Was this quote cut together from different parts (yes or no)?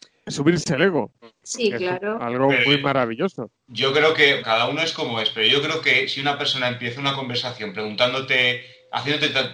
yes